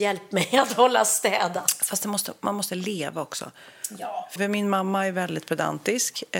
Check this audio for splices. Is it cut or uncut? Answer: cut